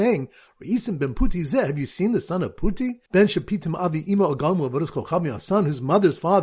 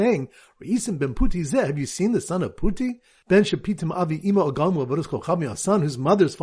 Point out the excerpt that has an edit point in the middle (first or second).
first